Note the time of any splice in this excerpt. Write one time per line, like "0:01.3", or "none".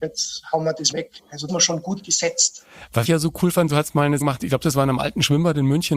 0:00.9
0:01.5
0:03.0
0:04.2